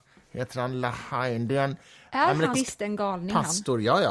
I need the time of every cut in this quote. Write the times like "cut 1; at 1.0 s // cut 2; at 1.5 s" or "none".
cut 1; at 2.5 s